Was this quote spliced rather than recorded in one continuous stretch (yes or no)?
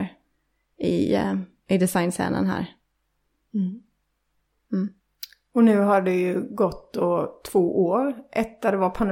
no